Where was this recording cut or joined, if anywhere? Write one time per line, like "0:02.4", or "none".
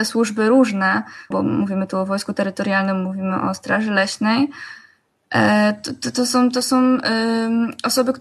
0:01.3

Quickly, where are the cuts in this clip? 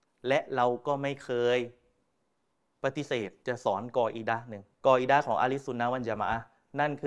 0:03.4
0:04.7

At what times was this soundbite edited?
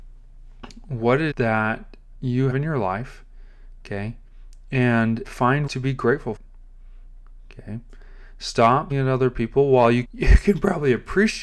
0:01.3
0:02.5
0:05.2
0:05.7
0:06.4
0:08.9
0:10.0

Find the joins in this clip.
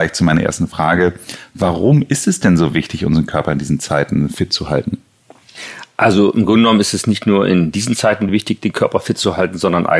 none

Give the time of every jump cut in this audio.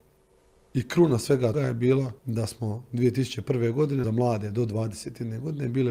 0:01.5
0:02.2
0:04.0

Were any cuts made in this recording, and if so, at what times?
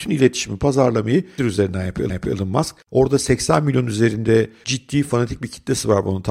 0:01.4
0:02.1
0:04.6

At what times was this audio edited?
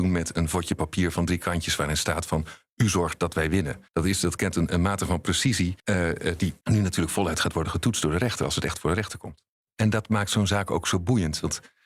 0:03.9
0:05.8
0:06.6

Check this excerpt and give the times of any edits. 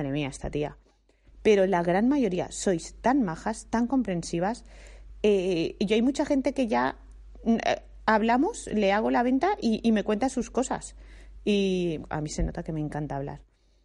0:12.0

